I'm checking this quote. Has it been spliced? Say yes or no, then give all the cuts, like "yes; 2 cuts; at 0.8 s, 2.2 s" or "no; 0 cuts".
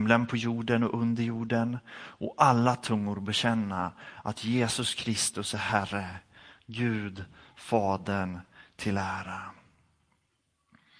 no; 0 cuts